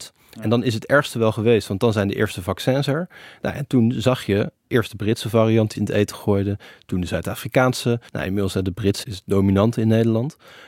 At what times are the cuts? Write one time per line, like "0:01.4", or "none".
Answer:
0:05.7
0:08.1
0:09.0